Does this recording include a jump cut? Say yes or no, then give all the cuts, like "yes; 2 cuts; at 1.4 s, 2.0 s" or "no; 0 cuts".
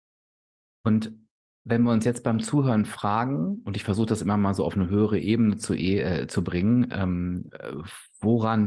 no; 0 cuts